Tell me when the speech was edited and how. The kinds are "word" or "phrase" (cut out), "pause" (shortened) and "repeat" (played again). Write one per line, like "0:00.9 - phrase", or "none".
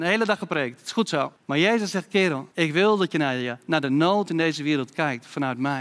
0:01.4 - pause
0:02.5 - pause

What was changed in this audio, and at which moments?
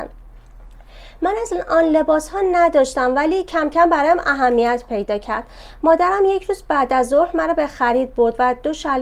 none

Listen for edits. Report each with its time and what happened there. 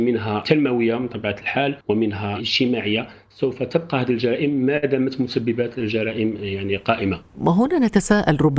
0:01.8 - pause

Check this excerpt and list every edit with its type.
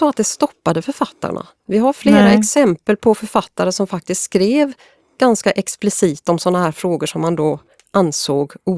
none

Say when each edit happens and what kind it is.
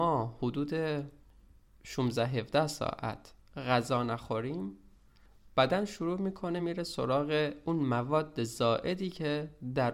none

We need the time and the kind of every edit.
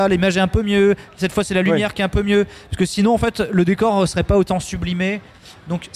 none

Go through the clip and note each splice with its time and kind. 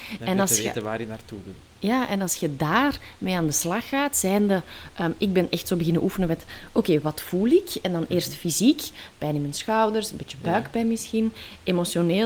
none

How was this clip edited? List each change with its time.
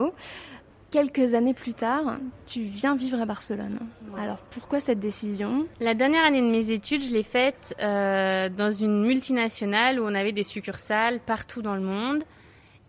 none

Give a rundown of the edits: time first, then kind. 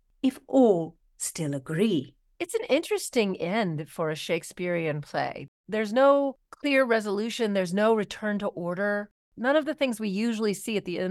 none

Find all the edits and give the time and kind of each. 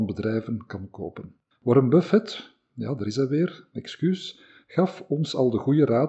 0:01.5 - pause

